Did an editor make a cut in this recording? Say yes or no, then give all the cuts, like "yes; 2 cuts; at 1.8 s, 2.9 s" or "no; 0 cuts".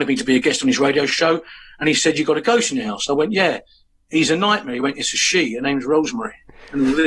no; 0 cuts